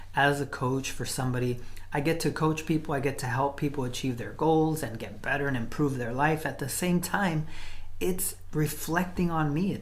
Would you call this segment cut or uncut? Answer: uncut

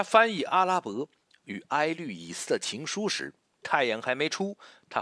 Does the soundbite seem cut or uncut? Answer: uncut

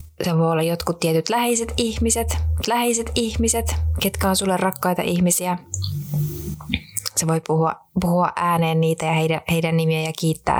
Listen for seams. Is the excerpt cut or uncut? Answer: cut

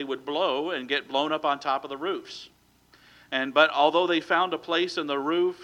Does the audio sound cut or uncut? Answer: uncut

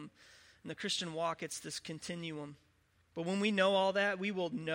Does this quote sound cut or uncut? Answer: cut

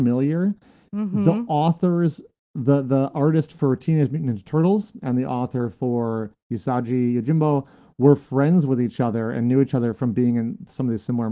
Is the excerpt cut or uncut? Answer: uncut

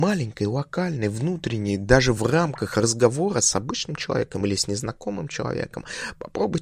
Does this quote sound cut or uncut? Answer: uncut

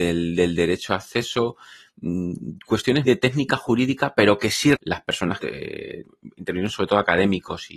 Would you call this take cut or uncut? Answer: cut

